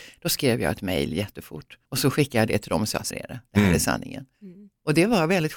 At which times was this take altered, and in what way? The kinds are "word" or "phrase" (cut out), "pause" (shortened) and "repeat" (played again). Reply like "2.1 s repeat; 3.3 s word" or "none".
1.8 s pause; 3.1 s word; 4.3 s pause